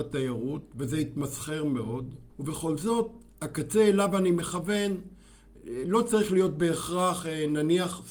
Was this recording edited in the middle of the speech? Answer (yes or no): yes